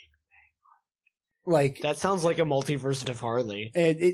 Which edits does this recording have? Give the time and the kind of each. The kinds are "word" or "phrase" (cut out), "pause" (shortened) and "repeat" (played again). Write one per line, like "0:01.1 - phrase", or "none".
0:03.0 - word

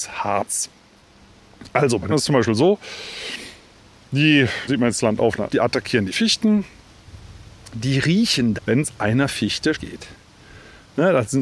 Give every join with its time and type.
0:02.1 - word
0:04.7 - word
0:05.5 - word
0:08.5 - word
0:09.7 - word

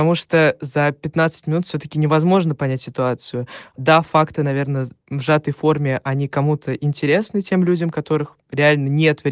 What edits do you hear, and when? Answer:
none

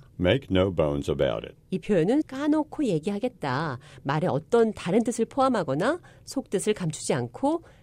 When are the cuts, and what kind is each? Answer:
0:02.2 - word

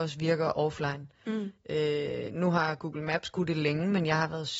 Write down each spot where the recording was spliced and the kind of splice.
none

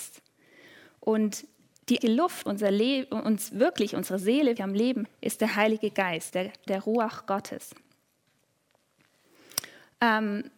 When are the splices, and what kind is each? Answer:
0:02.0 - word
0:02.5 - word
0:04.6 - word
0:05.1 - word
0:06.3 - word
0:06.7 - word

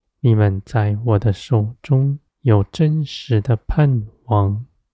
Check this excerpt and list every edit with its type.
0:02.3 - pause

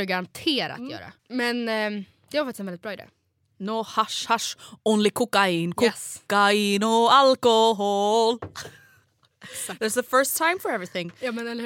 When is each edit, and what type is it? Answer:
0:01.2 - pause

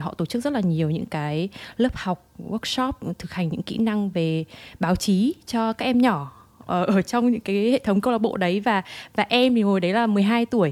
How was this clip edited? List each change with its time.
none

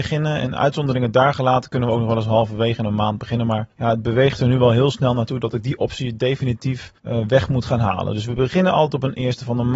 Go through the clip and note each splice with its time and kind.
0:03.7 - pause
0:07.0 - pause

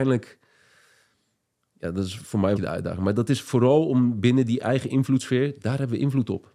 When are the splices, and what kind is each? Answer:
0:02.6 - phrase

